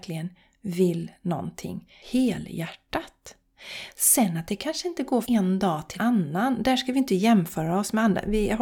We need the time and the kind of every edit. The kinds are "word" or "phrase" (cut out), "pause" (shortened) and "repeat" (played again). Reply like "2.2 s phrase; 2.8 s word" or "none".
2.0 s pause; 5.2 s word; 6.0 s word